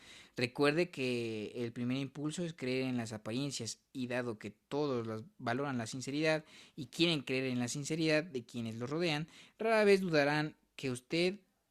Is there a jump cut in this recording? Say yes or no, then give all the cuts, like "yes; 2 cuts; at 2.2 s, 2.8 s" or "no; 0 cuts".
no; 0 cuts